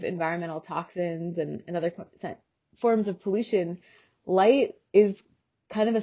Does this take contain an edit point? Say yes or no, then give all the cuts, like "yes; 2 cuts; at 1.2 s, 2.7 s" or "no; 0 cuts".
no; 0 cuts